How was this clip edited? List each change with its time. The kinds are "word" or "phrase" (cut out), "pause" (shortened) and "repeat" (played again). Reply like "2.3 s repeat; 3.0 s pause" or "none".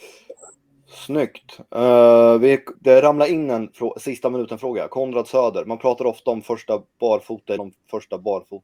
2.7 s word; 7.6 s phrase

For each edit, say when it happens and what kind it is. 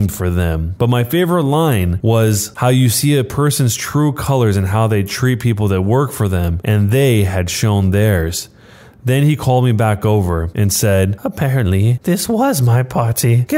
none

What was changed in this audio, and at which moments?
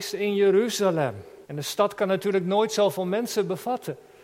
1.4 s pause

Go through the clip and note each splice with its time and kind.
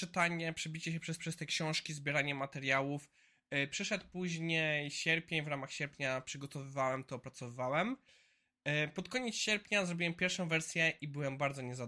1.2 s repeat

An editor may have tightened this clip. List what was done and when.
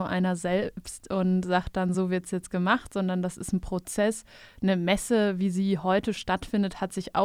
none

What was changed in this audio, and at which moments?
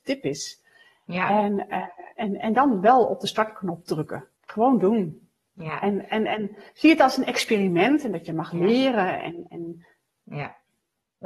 4.3 s pause

